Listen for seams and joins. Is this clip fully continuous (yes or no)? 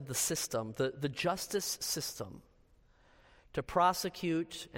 yes